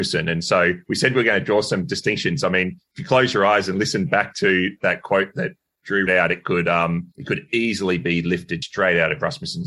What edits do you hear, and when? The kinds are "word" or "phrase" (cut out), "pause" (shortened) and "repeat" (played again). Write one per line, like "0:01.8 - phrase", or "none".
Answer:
0:06.1 - word
0:07.1 - pause
0:08.6 - word